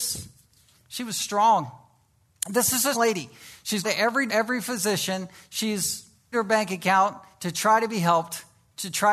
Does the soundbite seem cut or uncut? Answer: cut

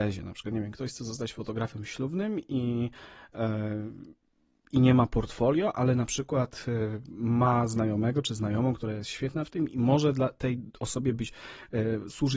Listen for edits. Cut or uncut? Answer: uncut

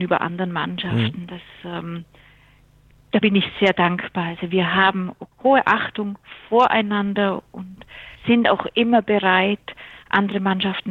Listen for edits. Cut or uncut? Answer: cut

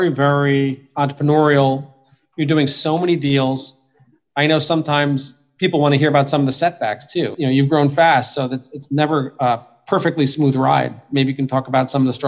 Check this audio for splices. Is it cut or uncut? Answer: uncut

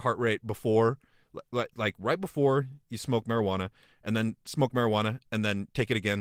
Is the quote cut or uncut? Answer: uncut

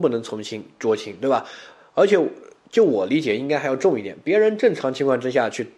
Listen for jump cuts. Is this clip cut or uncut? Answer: uncut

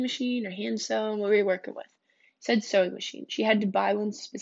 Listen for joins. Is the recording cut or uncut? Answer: uncut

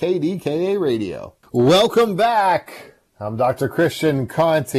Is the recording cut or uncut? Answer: cut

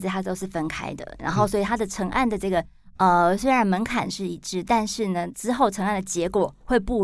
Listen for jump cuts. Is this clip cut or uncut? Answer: uncut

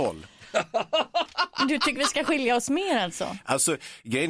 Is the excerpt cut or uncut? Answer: uncut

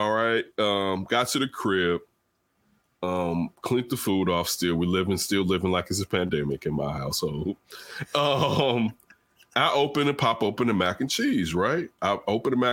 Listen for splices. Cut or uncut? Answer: uncut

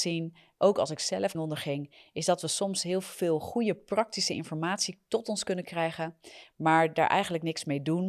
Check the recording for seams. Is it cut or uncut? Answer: cut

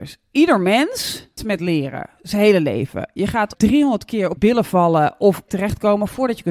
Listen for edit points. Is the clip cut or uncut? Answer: cut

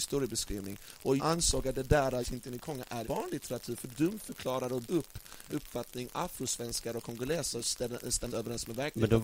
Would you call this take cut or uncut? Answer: cut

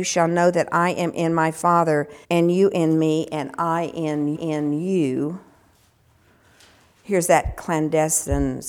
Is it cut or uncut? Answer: cut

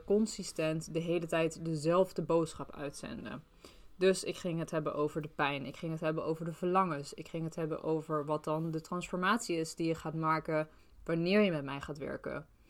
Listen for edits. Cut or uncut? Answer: uncut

